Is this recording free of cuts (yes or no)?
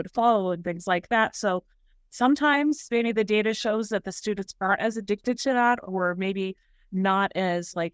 yes